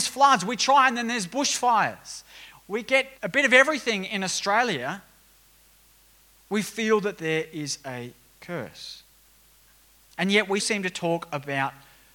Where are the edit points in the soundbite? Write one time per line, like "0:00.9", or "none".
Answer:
0:03.2
0:10.6